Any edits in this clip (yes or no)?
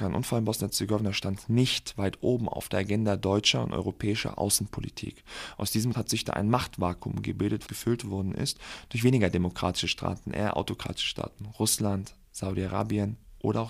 yes